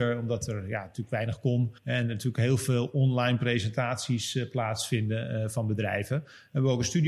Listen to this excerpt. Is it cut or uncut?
cut